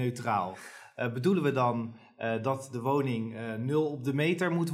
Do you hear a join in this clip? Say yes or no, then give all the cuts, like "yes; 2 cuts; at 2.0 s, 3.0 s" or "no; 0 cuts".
no; 0 cuts